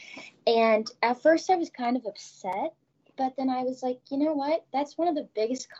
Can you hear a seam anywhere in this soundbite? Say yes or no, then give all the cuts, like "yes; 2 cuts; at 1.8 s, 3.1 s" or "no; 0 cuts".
no; 0 cuts